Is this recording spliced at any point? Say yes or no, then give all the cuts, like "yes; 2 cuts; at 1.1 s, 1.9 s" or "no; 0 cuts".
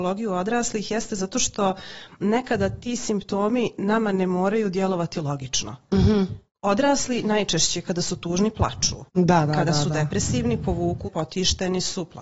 yes; 2 cuts; at 9.1 s, 11.1 s